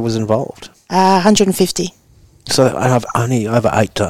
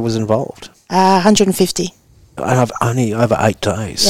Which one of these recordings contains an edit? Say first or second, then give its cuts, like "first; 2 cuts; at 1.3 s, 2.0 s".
second; 1 cut; at 2.4 s